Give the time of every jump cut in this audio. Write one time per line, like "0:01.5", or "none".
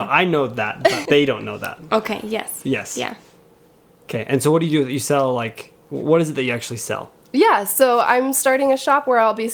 0:01.1